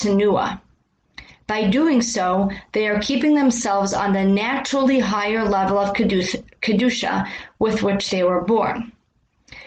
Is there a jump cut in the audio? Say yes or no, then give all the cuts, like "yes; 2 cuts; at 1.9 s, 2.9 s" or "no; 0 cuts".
no; 0 cuts